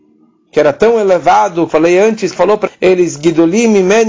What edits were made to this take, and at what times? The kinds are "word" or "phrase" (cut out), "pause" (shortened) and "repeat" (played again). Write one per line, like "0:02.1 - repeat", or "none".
0:01.7 - word
0:02.3 - word
0:02.7 - word